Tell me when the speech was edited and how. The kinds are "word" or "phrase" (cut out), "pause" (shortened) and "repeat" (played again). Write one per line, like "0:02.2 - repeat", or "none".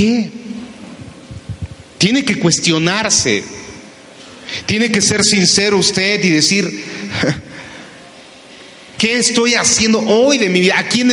none